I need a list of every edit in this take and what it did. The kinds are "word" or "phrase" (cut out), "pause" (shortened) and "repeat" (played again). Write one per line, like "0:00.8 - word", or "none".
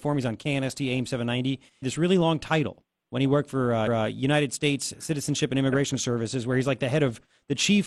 0:01.8 - phrase
0:03.9 - repeat